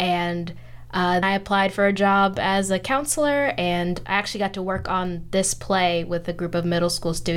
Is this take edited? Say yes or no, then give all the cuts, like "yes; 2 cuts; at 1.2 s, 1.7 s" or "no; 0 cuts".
yes; 1 cut; at 1.2 s